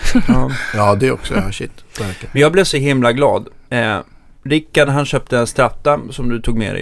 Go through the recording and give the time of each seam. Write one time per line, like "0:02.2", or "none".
none

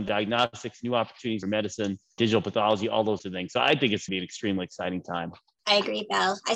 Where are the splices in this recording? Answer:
0:01.4
0:03.2
0:04.1

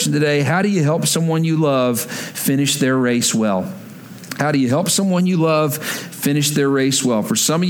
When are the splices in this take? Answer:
none

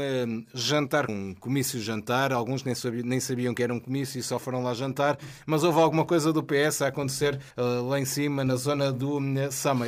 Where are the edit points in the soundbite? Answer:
0:01.1
0:07.5

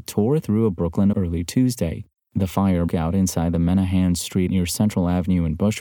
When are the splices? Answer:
0:01.1
0:02.9
0:04.5

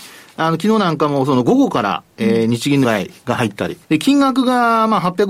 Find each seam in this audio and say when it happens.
0:02.8
0:03.2
0:03.8

